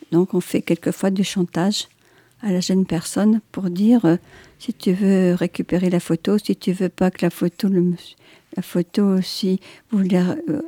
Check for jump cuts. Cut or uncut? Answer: uncut